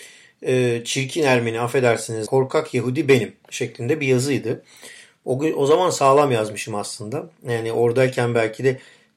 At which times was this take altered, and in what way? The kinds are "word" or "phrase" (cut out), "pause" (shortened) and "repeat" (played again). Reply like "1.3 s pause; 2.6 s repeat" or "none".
2.3 s phrase